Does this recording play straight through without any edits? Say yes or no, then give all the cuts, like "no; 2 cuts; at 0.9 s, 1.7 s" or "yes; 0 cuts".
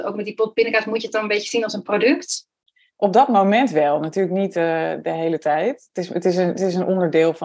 yes; 0 cuts